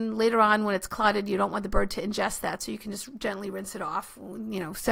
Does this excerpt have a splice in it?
no; 0 cuts

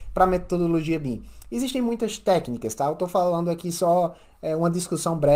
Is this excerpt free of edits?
yes; 0 cuts

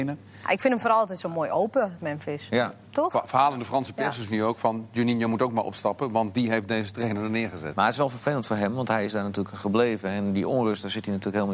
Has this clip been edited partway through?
yes; 2 cuts; at 2.0 s, 9.5 s

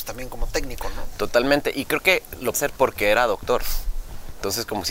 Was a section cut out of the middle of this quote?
yes; 1 cut; at 2.5 s

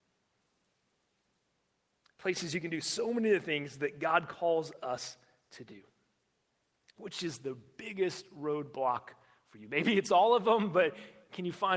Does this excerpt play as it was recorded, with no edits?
yes; 0 cuts

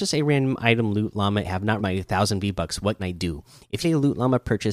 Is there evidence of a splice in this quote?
yes; 4 cuts; at 1.4 s, 1.8 s, 3.0 s, 3.8 s

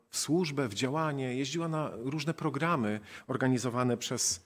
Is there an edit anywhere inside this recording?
no; 0 cuts

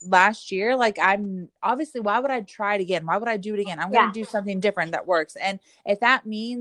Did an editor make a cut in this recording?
no; 0 cuts

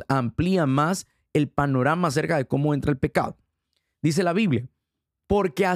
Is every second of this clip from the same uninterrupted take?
yes; 0 cuts

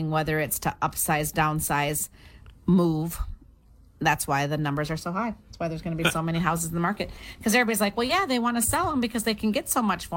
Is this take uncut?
yes; 0 cuts

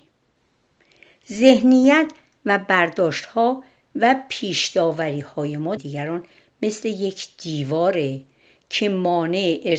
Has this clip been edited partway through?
yes; 1 cut; at 5.8 s

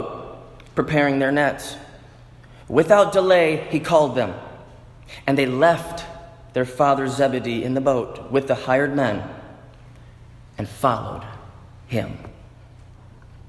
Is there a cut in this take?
no; 0 cuts

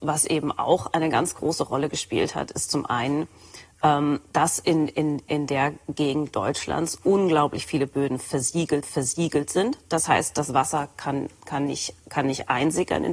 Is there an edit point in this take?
yes; 1 cut; at 8.8 s

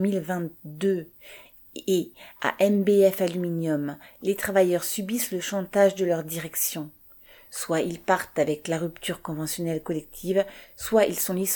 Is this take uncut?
yes; 0 cuts

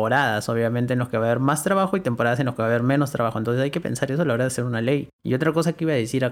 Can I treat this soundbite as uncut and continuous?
no; 1 cut; at 5.1 s

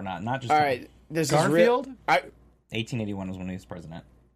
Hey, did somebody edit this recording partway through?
no; 0 cuts

